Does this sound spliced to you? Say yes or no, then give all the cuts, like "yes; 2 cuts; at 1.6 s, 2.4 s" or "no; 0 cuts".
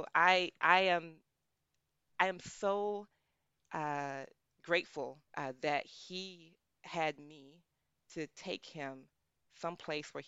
yes; 1 cut; at 5.3 s